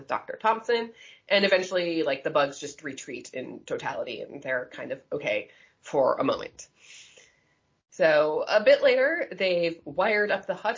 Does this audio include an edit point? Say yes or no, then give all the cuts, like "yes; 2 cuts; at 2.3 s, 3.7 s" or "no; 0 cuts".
no; 0 cuts